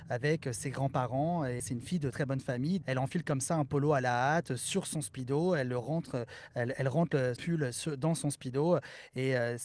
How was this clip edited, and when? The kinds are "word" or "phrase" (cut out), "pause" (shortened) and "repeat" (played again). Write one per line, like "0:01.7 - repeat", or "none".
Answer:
0:01.6 - word
0:02.1 - word
0:02.8 - word
0:07.4 - word